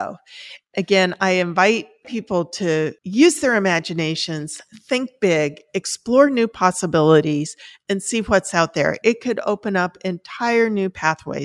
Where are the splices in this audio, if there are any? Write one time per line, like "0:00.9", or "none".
none